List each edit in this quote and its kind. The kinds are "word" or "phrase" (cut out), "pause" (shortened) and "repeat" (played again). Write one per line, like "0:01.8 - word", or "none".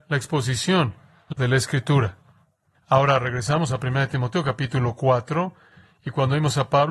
0:01.3 - word